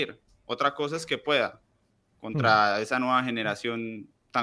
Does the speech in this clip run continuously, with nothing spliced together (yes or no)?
yes